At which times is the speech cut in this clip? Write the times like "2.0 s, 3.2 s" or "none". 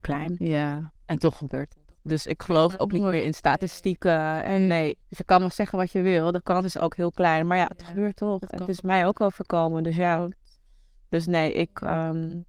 1.0 s, 2.0 s, 5.0 s